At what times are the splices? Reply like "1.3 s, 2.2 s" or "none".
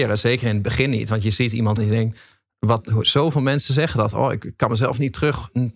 1.8 s